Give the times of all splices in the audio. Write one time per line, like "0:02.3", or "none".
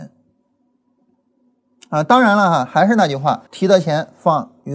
0:03.5